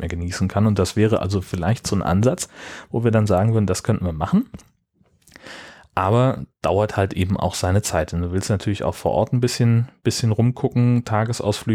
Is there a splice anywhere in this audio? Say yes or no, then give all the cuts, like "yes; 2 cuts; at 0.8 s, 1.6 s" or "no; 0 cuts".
no; 0 cuts